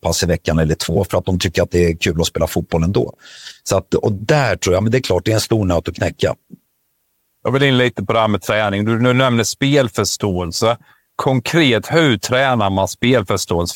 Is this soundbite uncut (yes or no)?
yes